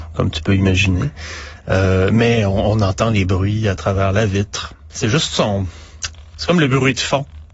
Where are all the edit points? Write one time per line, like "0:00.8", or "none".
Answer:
none